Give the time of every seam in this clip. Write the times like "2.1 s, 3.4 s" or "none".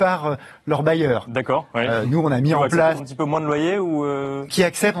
3.0 s